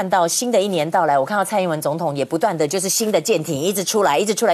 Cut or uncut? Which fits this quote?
uncut